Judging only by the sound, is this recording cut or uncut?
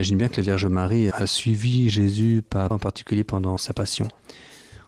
cut